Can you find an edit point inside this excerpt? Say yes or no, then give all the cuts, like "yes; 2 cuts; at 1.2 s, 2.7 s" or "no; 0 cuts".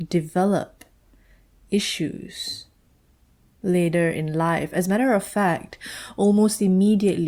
no; 0 cuts